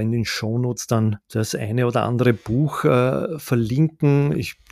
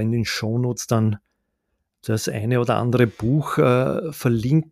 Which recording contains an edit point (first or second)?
first